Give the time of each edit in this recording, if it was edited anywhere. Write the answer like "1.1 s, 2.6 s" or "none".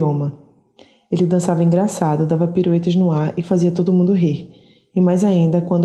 none